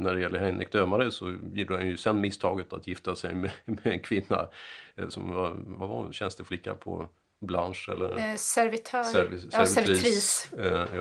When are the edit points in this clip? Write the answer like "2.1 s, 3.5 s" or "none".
none